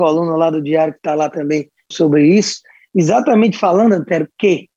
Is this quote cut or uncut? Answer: cut